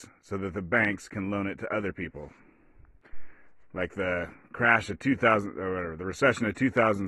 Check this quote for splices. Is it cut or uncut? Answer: uncut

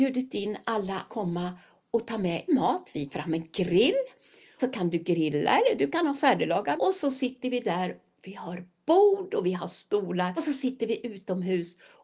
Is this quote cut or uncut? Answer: cut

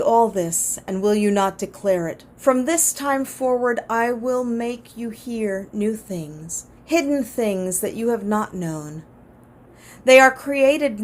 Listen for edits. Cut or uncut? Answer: cut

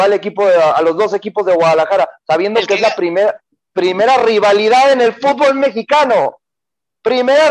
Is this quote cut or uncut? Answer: uncut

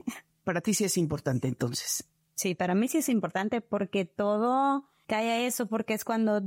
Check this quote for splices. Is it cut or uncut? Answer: uncut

